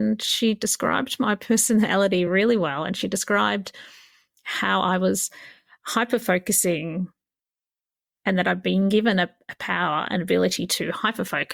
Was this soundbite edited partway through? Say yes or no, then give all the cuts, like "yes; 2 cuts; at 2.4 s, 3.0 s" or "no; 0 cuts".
no; 0 cuts